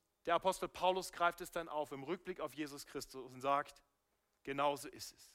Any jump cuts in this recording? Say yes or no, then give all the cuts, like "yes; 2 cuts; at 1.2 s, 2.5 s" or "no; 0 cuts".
no; 0 cuts